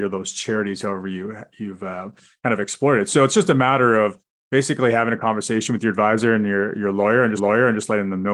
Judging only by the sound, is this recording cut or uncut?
cut